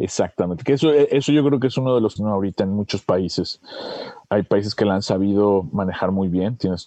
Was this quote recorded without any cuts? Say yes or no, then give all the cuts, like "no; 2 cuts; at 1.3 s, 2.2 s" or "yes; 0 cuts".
no; 2 cuts; at 2.2 s, 4.2 s